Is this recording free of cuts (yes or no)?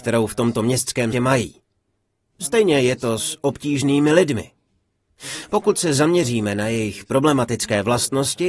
no